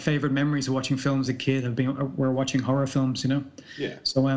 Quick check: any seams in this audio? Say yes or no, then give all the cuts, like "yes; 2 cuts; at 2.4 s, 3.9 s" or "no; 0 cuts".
yes; 1 cut; at 1.3 s